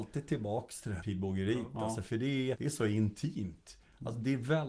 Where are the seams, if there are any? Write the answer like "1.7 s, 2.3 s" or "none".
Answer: 1.0 s, 2.5 s

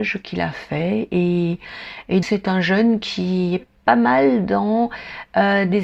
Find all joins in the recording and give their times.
2.2 s

